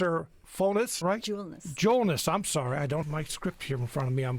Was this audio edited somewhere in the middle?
yes; 2 cuts; at 1.0 s, 3.0 s

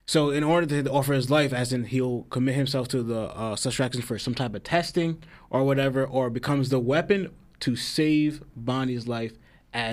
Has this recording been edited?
no; 0 cuts

